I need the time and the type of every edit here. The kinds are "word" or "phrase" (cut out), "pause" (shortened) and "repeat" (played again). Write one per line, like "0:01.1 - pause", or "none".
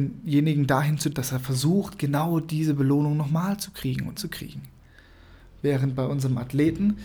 0:01.1 - word
0:04.2 - word